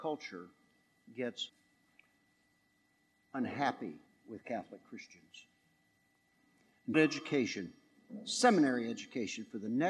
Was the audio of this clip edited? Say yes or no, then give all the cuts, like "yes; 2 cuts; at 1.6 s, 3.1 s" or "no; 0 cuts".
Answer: yes; 3 cuts; at 1.5 s, 4.1 s, 6.9 s